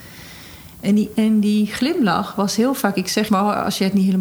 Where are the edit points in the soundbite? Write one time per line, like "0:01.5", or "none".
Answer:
0:03.3